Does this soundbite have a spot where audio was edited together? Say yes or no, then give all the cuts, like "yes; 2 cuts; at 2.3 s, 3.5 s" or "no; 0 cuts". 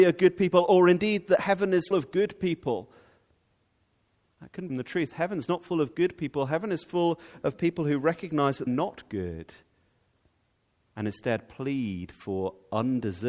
yes; 3 cuts; at 1.9 s, 4.7 s, 8.7 s